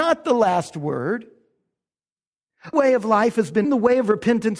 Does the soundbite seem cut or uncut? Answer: cut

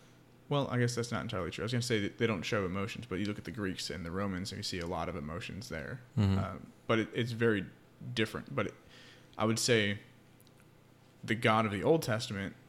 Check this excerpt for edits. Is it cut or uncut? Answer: uncut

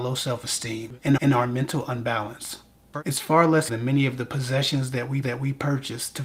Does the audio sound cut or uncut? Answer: cut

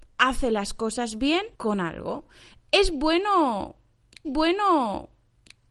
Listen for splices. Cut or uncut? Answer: cut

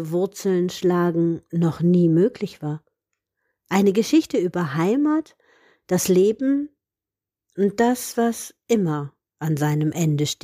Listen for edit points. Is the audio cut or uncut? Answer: uncut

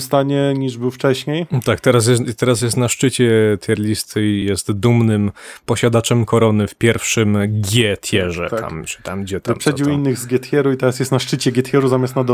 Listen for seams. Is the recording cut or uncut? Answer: uncut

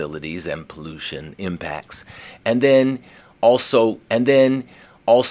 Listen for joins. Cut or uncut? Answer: cut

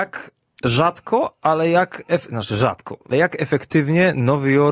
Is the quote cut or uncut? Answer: cut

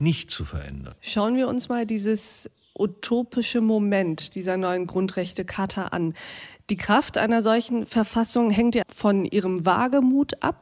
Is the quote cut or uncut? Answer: cut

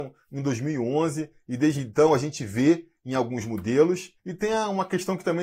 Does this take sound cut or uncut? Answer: cut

